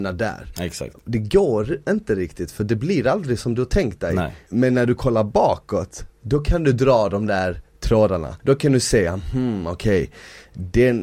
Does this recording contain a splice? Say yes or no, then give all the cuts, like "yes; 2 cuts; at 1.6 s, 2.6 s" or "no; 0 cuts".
yes; 1 cut; at 8.4 s